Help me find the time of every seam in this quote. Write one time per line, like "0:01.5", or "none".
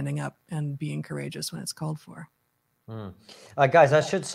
none